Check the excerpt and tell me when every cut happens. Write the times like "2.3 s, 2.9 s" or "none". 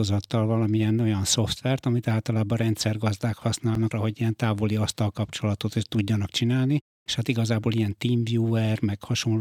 3.9 s